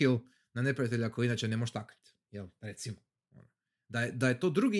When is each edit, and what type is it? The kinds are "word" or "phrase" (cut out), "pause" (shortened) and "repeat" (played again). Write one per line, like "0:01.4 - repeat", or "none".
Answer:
none